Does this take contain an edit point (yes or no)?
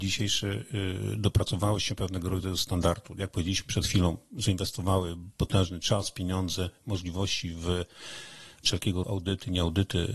yes